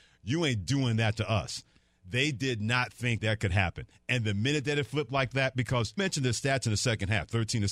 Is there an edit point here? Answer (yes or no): yes